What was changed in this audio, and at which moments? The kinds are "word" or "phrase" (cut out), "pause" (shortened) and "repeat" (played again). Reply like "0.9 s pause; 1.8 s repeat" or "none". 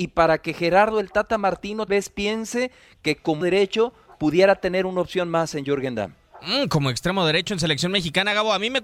1.9 s word; 3.4 s word